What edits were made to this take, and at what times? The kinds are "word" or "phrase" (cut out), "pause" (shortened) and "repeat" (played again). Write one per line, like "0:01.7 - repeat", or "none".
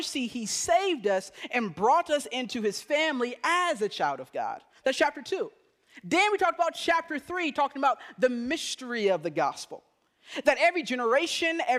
none